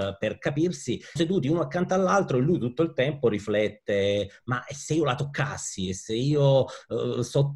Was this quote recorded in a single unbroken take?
no; 1 cut; at 1.2 s

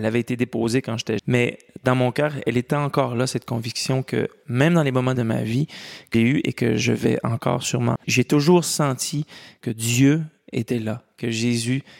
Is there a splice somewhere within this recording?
yes; 4 cuts; at 1.2 s, 5.2 s, 6.1 s, 8.0 s

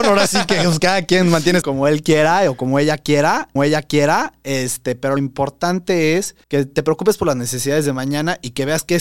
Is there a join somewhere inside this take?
yes; 4 cuts; at 1.6 s, 3.6 s, 5.2 s, 6.4 s

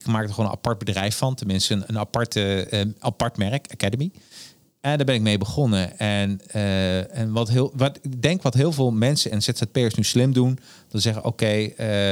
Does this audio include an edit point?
no; 0 cuts

